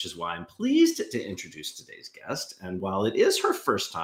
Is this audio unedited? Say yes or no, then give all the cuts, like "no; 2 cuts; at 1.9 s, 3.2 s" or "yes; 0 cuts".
yes; 0 cuts